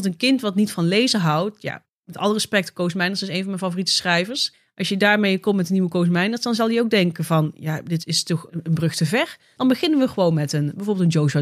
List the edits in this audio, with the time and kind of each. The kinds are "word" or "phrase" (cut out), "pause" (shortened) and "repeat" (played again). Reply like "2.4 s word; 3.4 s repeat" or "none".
8.0 s word; 8.5 s word